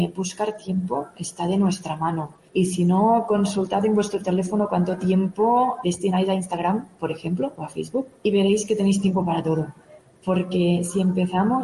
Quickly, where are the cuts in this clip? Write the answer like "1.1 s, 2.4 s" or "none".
2.5 s, 5.8 s, 8.2 s